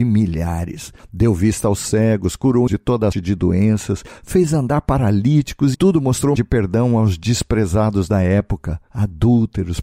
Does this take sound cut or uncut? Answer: cut